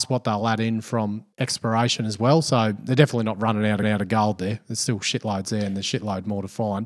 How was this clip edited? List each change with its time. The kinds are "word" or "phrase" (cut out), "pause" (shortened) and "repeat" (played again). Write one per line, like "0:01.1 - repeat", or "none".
0:01.3 - pause
0:03.8 - repeat